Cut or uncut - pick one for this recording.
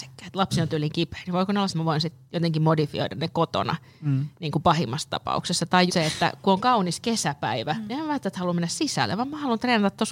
cut